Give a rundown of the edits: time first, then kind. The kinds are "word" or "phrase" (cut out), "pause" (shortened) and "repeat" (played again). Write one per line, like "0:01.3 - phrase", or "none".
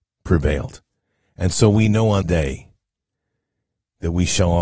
0:02.2 - word